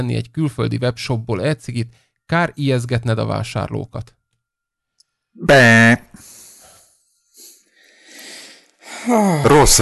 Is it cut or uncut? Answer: uncut